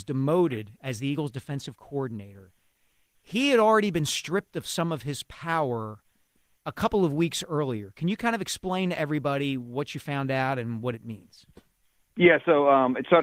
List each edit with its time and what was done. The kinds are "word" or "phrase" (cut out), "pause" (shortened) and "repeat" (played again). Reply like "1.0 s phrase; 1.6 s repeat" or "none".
none